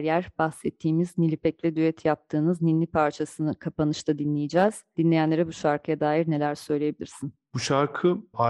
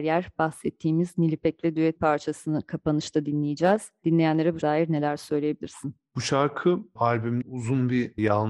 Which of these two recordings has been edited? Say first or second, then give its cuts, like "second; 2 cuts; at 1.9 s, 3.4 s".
second; 3 cuts; at 2.0 s, 4.6 s, 7.4 s